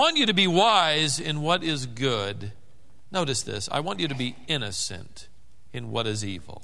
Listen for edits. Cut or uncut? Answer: uncut